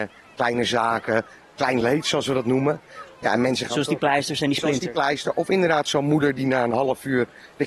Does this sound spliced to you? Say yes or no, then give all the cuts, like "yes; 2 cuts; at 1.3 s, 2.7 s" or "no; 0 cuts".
no; 0 cuts